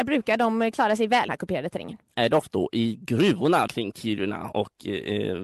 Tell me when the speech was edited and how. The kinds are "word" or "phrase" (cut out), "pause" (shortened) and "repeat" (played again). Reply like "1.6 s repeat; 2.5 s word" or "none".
1.3 s word; 2.5 s word; 3.7 s word